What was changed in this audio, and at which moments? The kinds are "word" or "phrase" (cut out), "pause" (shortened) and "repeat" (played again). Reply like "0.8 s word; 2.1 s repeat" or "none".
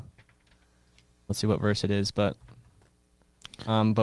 1.3 s word